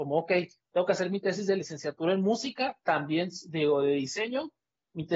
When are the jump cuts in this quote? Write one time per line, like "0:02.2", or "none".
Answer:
none